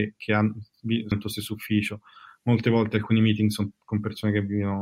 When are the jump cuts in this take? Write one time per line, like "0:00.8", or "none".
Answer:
0:01.1

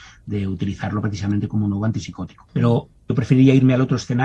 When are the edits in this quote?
0:03.0

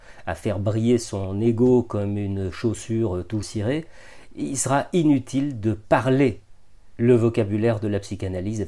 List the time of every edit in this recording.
0:03.4

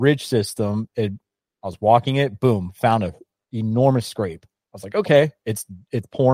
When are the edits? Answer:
none

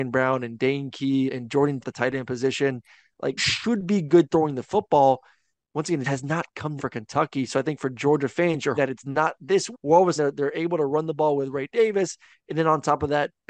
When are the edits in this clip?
0:01.3
0:01.8
0:03.4
0:06.0
0:06.8
0:08.8
0:09.7
0:10.2

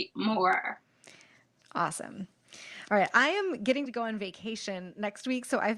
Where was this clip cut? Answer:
0:03.9

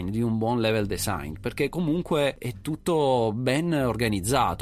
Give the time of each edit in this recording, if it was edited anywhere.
none

